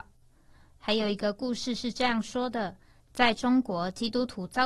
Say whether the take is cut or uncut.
uncut